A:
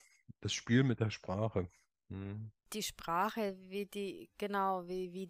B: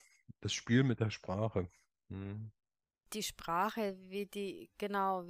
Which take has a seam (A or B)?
A